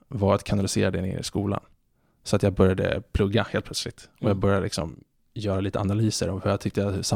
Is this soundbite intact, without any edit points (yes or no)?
yes